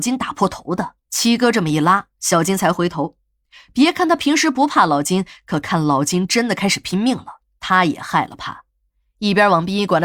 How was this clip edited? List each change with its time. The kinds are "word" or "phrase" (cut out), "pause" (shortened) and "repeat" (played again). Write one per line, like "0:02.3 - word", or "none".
0:01.0 - pause